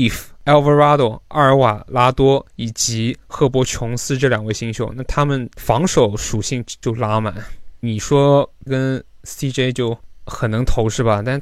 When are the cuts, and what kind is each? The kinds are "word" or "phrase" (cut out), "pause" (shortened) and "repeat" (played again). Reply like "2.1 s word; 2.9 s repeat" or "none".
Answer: 8.7 s word